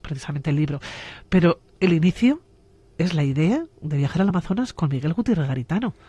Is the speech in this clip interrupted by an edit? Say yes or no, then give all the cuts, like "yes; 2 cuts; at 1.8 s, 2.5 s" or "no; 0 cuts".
no; 0 cuts